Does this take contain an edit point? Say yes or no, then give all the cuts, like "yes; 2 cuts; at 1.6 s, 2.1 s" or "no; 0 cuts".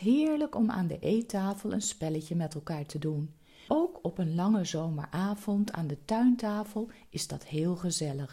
yes; 1 cut; at 3.7 s